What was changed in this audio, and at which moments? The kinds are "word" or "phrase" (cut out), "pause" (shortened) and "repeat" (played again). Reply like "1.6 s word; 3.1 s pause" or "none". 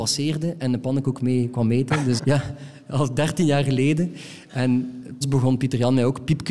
2.2 s word; 5.2 s word